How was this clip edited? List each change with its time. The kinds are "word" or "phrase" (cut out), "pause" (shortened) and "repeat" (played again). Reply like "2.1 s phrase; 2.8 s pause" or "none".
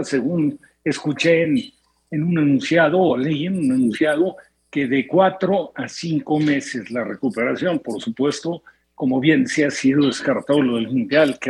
none